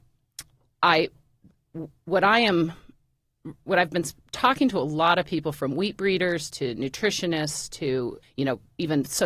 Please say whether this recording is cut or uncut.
cut